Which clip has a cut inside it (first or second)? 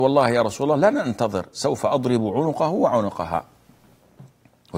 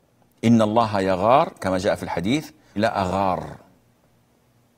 second